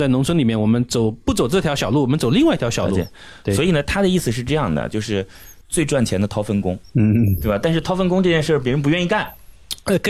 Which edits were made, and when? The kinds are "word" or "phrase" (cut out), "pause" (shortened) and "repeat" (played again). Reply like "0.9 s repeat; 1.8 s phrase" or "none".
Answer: none

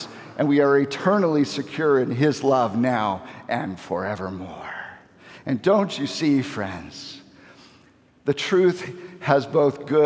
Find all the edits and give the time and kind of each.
none

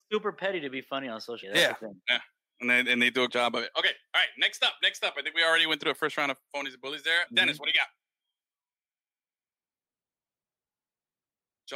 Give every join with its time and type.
1.4 s word; 3.3 s word; 7.3 s word

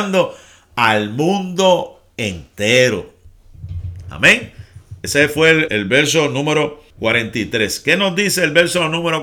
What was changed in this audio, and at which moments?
5.7 s word; 6.9 s pause

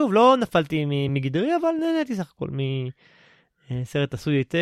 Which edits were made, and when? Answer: none

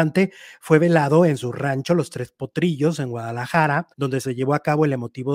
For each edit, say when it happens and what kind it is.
3.9 s pause

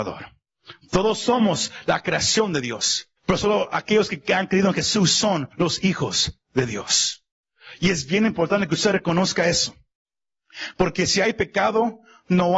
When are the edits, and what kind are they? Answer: 3.2 s pause; 5.5 s pause

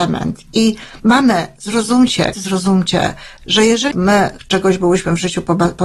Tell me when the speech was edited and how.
1.0 s pause; 2.3 s word; 3.9 s phrase

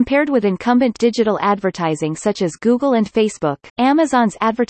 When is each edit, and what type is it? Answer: 3.7 s pause

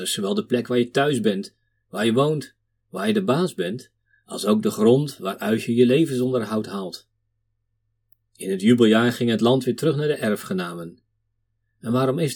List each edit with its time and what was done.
none

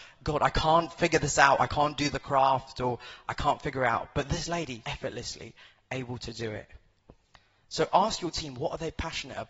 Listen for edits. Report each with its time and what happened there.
4.8 s word

